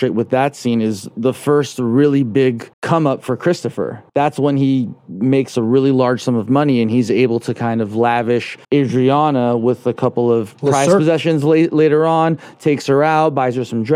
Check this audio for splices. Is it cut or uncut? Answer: cut